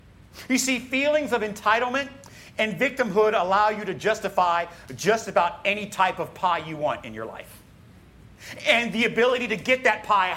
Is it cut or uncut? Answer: uncut